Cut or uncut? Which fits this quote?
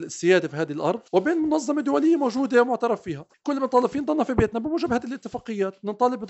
cut